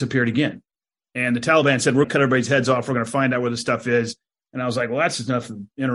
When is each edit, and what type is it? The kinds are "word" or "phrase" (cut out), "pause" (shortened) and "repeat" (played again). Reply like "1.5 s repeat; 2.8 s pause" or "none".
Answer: 2.0 s word

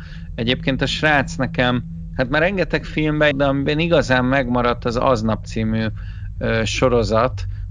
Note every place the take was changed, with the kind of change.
3.3 s word; 5.4 s word

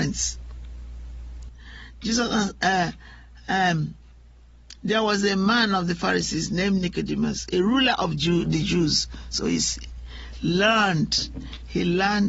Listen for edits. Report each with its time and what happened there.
none

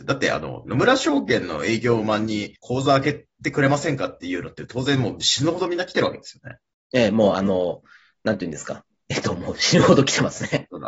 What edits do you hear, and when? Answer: 2.6 s pause

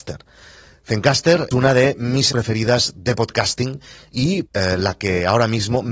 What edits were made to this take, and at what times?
1.5 s word; 2.3 s word; 4.4 s word

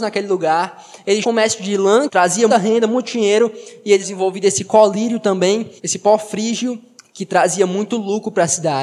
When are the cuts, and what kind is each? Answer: 1.2 s word; 2.1 s word; 2.5 s word; 4.0 s word; 5.8 s pause; 7.0 s pause

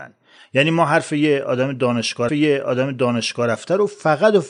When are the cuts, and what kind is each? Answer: 2.3 s repeat

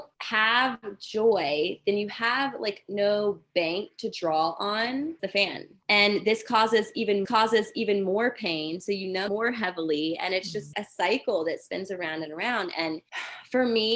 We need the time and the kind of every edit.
5.2 s phrase; 7.2 s repeat; 9.3 s word; 10.7 s word; 12.3 s word

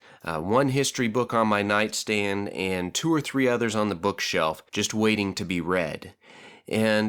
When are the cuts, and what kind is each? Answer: 4.7 s pause

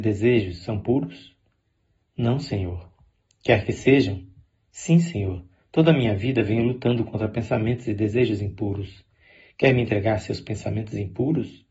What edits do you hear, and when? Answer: none

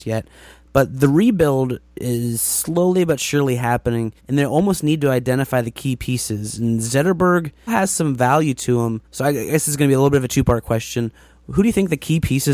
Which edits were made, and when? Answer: 4.2 s pause; 7.7 s word; 9.0 s pause

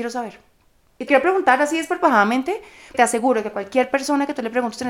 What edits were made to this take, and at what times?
1.1 s word; 2.9 s word

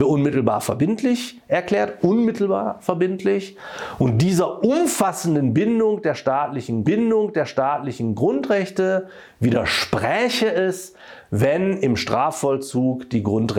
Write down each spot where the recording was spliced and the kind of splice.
6.8 s repeat

